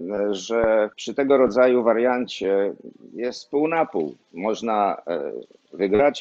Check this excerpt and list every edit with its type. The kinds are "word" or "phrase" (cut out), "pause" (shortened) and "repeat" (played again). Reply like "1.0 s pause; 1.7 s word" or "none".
0.9 s pause; 4.2 s pause